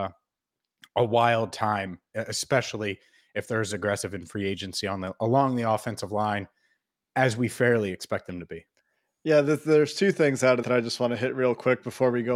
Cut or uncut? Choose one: cut